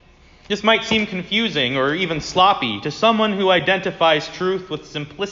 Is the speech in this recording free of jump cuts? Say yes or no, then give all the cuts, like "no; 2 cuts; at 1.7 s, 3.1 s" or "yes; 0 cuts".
yes; 0 cuts